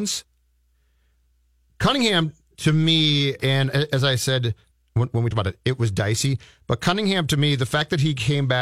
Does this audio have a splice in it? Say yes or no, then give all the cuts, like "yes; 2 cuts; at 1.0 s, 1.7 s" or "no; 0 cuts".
yes; 2 cuts; at 3.4 s, 5.3 s